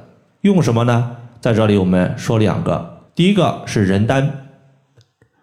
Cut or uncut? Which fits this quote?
cut